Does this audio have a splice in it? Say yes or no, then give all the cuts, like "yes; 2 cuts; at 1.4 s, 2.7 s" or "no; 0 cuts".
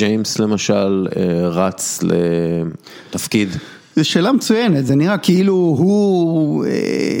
no; 0 cuts